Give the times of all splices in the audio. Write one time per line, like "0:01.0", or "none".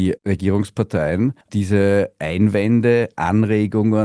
0:01.4